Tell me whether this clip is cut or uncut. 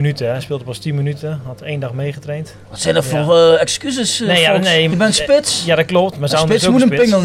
cut